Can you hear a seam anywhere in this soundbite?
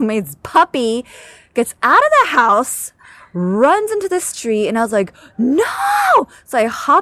no; 0 cuts

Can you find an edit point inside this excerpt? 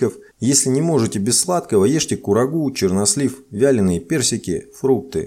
no; 0 cuts

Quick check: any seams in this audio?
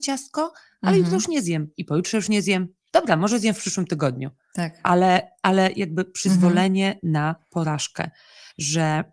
no; 0 cuts

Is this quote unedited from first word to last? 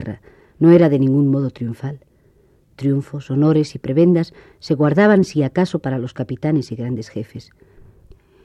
yes; 0 cuts

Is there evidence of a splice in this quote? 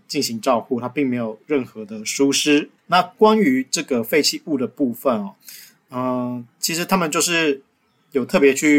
yes; 1 cut; at 2.8 s

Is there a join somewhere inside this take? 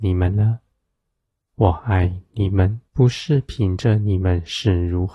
yes; 1 cut; at 2.9 s

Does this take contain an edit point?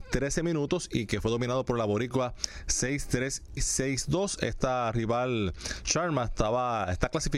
yes; 1 cut; at 3.6 s

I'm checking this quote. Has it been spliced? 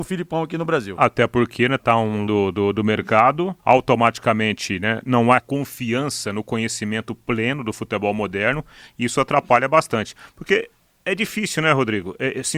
yes; 4 cuts; at 1.8 s, 2.3 s, 3.6 s, 5.4 s

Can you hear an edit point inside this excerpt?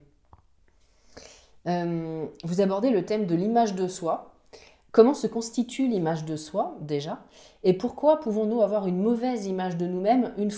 no; 0 cuts

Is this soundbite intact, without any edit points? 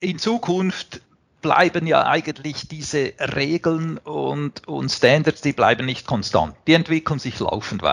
yes; 0 cuts

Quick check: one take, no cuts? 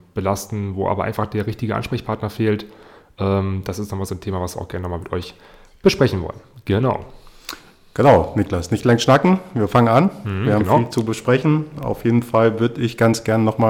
yes; 0 cuts

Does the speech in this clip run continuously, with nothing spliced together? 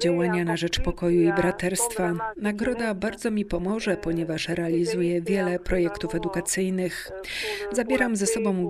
yes; 0 cuts

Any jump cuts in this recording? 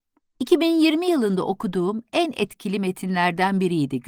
no; 0 cuts

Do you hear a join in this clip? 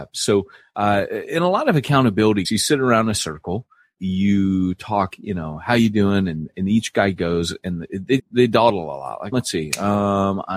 yes; 6 cuts; at 2.4 s, 4.0 s, 5.1 s, 6.5 s, 8.2 s, 9.3 s

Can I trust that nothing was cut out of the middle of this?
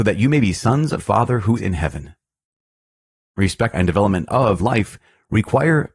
no; 4 cuts; at 1.0 s, 1.6 s, 3.7 s, 4.6 s

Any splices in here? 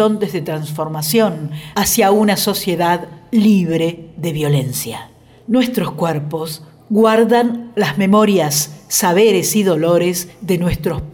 no; 0 cuts

